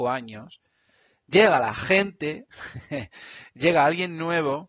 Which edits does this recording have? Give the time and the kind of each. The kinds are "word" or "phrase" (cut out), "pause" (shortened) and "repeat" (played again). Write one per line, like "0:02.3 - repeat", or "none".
none